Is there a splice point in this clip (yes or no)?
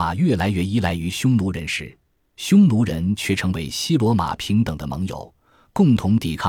no